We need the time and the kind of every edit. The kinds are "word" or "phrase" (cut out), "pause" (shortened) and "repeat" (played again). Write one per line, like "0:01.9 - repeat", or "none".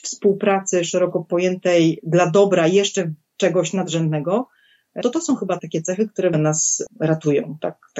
0:05.0 - word
0:05.6 - word
0:06.3 - phrase